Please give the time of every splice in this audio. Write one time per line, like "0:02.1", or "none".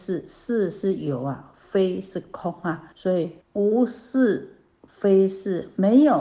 0:02.9
0:03.4